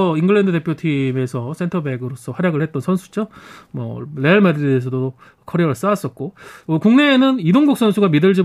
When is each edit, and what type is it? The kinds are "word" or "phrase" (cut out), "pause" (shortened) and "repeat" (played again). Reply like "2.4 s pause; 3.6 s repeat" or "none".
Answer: none